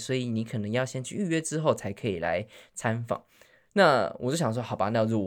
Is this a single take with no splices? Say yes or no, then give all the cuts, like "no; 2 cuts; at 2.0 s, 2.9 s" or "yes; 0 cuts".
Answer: yes; 0 cuts